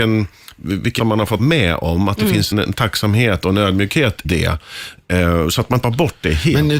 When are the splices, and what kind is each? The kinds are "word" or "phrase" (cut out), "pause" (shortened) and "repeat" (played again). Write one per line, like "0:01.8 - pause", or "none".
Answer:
0:01.0 - word
0:01.4 - word
0:02.5 - word
0:04.2 - word
0:05.8 - word